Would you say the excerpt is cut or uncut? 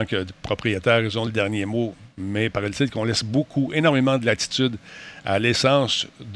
uncut